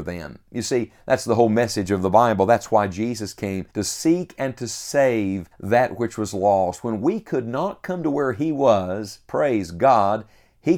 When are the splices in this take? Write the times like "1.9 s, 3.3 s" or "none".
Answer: 3.7 s, 5.5 s